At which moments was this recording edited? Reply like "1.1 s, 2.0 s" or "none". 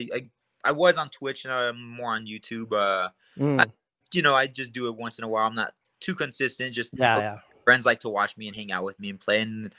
none